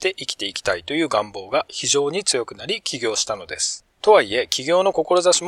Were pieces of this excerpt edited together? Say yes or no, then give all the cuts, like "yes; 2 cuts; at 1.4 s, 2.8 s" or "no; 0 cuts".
yes; 1 cut; at 3.9 s